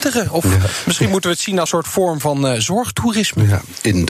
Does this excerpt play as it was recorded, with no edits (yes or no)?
no